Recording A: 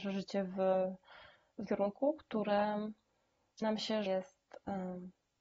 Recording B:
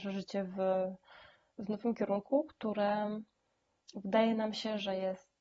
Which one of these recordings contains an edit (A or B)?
A